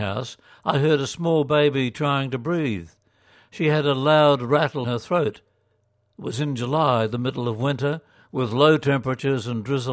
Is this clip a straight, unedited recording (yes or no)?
no